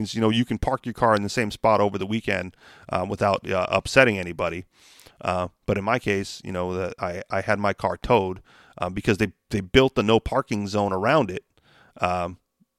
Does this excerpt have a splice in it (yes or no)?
no